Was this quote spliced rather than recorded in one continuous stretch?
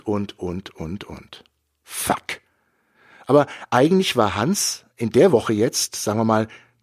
no; 0 cuts

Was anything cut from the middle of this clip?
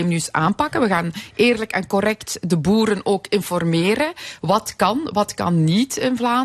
no; 0 cuts

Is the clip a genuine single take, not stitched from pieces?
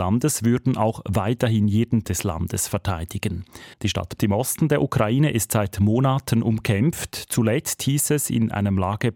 no; 3 cuts; at 2.0 s, 3.7 s, 4.2 s

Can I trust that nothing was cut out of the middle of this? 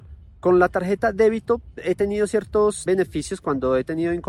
no; 1 cut; at 2.9 s

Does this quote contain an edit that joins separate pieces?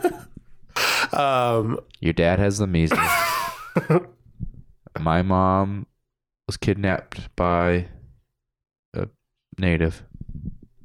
no; 0 cuts

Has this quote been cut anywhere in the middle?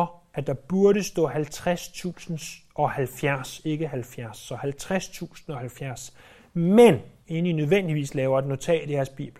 no; 0 cuts

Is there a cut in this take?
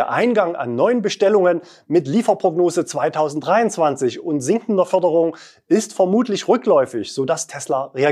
no; 0 cuts

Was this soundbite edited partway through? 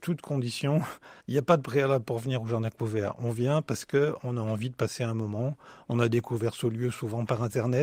yes; 1 cut; at 1.2 s

